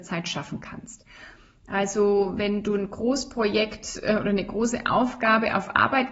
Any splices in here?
no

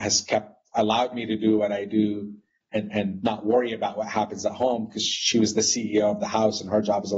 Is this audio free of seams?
yes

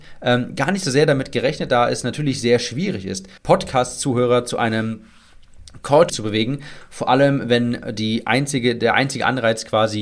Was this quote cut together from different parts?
yes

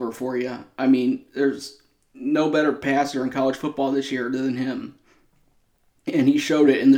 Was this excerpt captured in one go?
yes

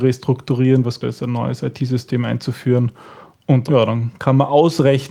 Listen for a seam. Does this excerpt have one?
yes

